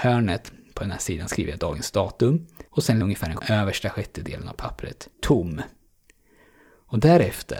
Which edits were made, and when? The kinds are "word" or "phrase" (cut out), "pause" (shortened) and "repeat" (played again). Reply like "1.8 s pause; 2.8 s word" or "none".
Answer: 2.7 s pause; 3.0 s word; 3.4 s phrase; 5.1 s pause